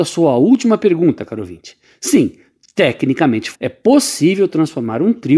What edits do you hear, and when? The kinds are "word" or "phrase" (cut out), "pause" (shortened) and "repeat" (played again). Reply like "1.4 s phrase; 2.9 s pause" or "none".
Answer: 3.5 s word